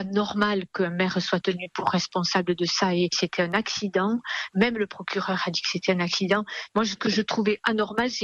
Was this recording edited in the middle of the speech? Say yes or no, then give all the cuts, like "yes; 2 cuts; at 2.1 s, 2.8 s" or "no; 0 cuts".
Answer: no; 0 cuts